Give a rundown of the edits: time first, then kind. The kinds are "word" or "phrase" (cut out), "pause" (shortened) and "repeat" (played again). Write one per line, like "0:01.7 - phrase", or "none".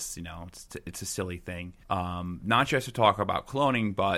0:01.8 - pause